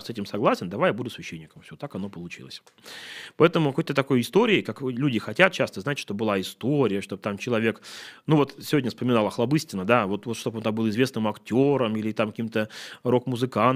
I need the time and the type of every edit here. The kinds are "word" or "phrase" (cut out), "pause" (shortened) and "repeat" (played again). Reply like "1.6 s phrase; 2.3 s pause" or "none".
none